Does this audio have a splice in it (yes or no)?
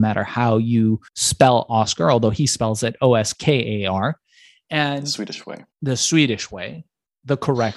yes